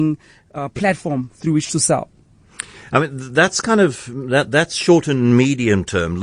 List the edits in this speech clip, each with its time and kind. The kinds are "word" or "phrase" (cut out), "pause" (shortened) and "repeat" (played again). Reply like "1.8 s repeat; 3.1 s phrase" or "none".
none